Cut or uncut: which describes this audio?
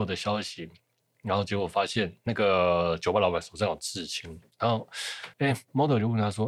cut